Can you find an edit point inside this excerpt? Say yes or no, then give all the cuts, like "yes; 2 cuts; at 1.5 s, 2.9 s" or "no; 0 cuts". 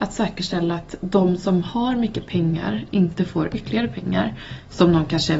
no; 0 cuts